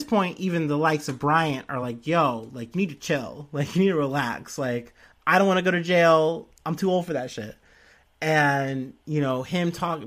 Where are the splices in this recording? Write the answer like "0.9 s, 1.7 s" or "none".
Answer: none